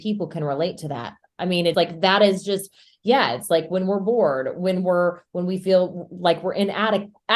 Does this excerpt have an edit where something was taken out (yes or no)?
yes